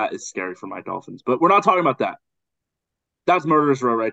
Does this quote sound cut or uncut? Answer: uncut